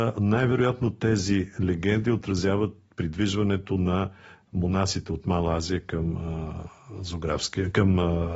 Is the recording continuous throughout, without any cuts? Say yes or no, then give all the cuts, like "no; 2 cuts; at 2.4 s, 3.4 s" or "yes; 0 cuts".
yes; 0 cuts